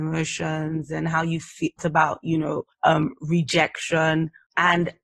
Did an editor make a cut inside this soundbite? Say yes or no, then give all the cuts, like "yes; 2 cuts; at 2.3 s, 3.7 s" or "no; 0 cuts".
yes; 2 cuts; at 1.8 s, 2.7 s